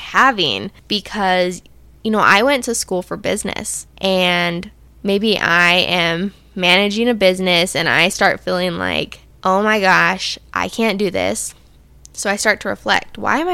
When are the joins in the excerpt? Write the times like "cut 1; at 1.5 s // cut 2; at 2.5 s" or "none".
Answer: none